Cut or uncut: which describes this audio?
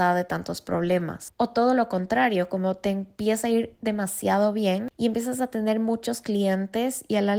uncut